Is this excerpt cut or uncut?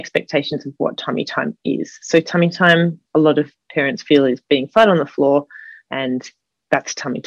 uncut